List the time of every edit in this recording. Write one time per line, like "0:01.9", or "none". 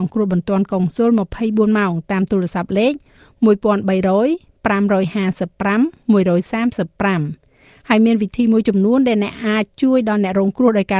none